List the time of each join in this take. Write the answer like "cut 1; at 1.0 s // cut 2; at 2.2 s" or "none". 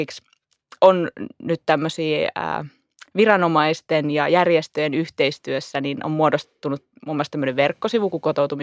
none